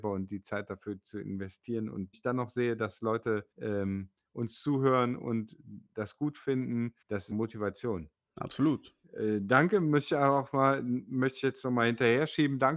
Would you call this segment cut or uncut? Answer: cut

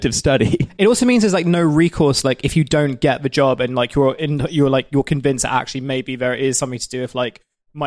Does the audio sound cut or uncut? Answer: uncut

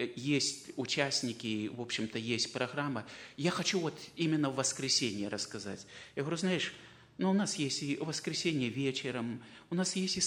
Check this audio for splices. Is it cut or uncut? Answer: uncut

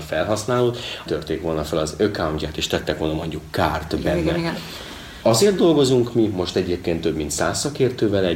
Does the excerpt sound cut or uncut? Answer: cut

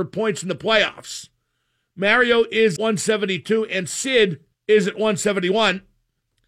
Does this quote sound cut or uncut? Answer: cut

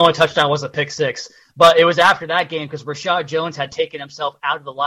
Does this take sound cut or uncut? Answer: uncut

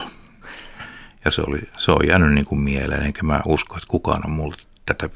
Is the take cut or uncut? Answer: uncut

